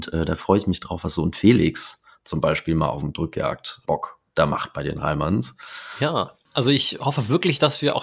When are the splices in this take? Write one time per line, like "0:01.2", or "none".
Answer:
0:03.8